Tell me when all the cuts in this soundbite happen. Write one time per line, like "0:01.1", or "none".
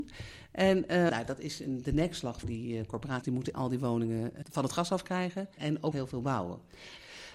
0:01.1
0:02.4
0:03.2
0:03.5
0:04.4
0:05.6
0:05.9